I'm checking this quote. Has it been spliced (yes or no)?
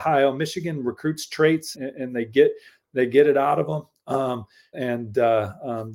yes